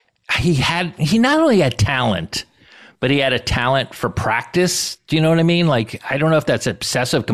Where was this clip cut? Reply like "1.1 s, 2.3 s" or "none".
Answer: none